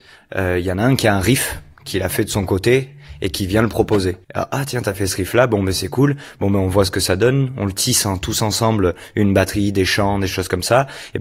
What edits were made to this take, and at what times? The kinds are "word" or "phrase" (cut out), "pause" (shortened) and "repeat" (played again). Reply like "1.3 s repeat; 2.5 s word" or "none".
4.2 s pause